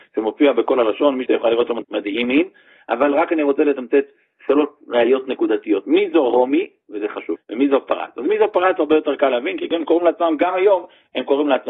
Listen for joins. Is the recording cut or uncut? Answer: cut